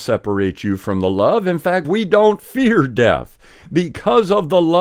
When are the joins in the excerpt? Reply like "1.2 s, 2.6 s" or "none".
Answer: 1.8 s